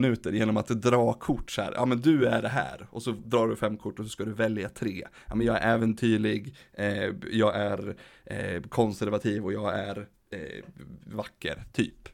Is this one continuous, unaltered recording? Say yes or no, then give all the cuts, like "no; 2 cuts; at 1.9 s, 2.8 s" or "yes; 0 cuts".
yes; 0 cuts